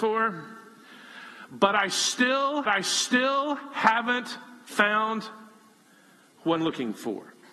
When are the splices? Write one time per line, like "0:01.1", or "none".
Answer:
0:02.6
0:06.6